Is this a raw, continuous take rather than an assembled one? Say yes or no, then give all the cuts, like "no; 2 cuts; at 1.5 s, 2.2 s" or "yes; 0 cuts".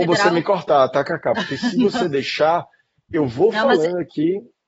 yes; 0 cuts